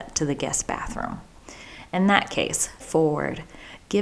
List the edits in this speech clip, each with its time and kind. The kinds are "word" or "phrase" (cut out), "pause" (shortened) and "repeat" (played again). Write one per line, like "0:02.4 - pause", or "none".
0:02.8 - phrase

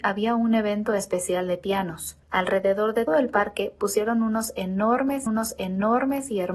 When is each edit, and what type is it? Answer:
0:02.2 - pause
0:03.1 - word
0:05.3 - repeat

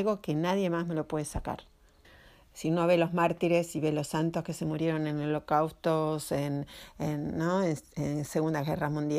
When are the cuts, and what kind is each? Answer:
0:02.0 - pause

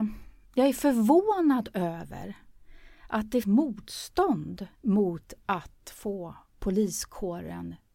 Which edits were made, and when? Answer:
0:03.4 - word
0:04.7 - pause

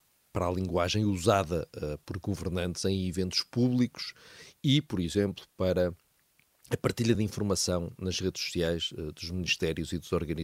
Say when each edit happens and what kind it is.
none

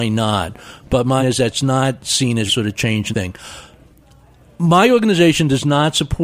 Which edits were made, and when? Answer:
0:01.2 - word
0:02.5 - word
0:03.1 - word

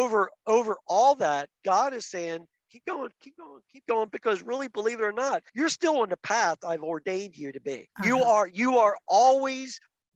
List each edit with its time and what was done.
0:05.5 - pause
0:07.9 - pause

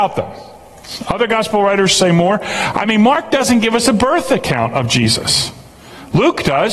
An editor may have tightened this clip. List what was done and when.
none

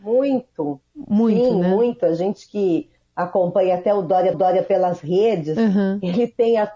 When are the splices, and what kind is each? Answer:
0:04.3 - repeat

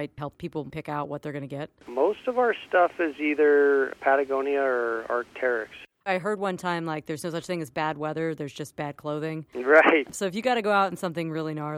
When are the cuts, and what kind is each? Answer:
none

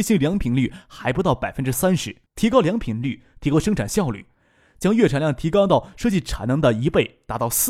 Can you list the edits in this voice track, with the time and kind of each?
0:02.3 - pause

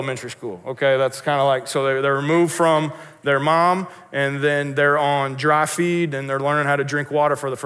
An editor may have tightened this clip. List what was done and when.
none

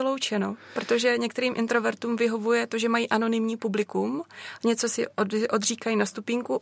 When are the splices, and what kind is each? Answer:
none

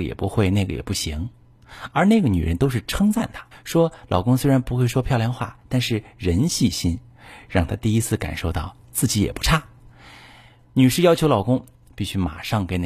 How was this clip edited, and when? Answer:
0:03.5 - pause
0:09.8 - pause

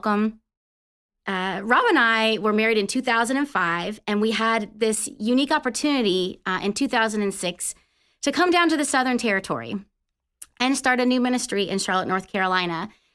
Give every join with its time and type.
none

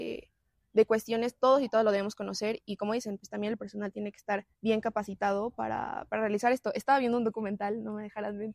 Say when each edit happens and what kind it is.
0:04.5 - pause

